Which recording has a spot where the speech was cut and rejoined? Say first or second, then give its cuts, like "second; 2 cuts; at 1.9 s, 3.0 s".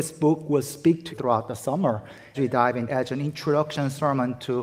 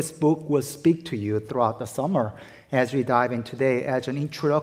first; 3 cuts; at 1.1 s, 2.3 s, 2.9 s